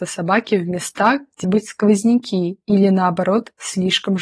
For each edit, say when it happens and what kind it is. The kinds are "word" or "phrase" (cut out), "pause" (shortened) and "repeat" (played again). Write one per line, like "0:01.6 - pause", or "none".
0:01.4 - word